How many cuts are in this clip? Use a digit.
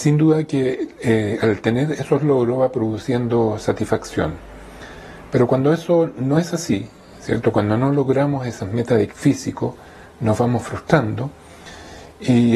1